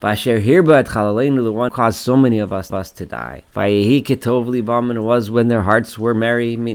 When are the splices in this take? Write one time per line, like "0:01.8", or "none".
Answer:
0:01.7
0:02.7
0:03.5